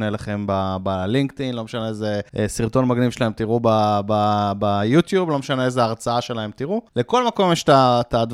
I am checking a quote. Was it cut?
yes; 2 cuts; at 2.3 s, 6.9 s

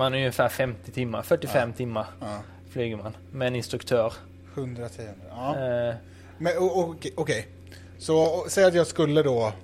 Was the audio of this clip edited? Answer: no; 0 cuts

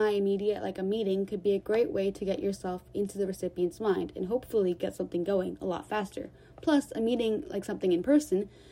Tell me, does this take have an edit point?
no; 0 cuts

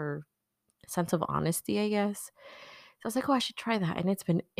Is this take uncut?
yes; 0 cuts

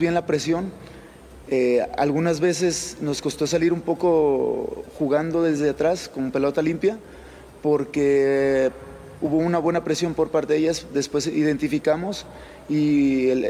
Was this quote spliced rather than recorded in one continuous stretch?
no; 0 cuts

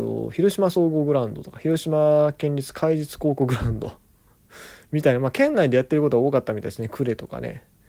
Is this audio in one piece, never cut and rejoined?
yes; 0 cuts

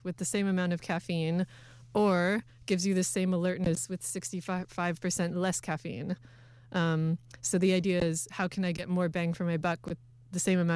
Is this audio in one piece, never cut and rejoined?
yes; 0 cuts

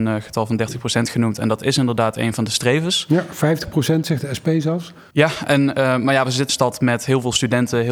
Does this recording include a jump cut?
yes; 1 cut; at 6.5 s

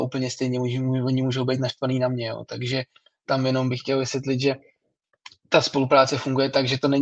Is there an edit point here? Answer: no; 0 cuts

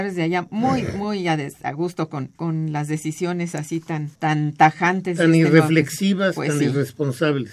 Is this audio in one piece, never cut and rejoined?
no; 2 cuts; at 2.3 s, 4.1 s

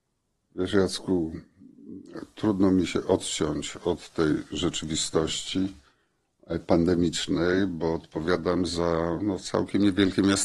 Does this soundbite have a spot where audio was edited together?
no; 0 cuts

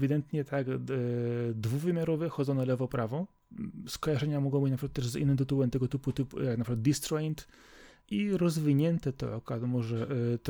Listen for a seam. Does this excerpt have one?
no; 0 cuts

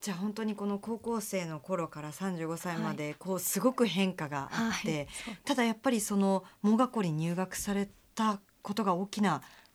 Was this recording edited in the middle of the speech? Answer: no; 0 cuts

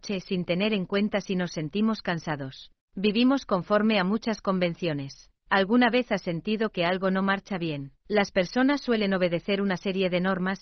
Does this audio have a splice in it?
yes; 3 cuts; at 2.8 s, 5.4 s, 8.0 s

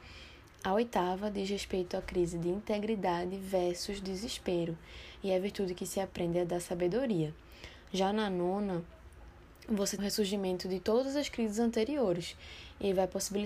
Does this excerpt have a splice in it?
yes; 1 cut; at 10.0 s

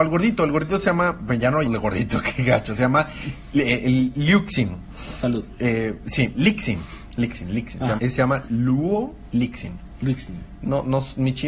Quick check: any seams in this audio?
yes; 4 cuts; at 1.7 s, 6.3 s, 8.0 s, 8.5 s

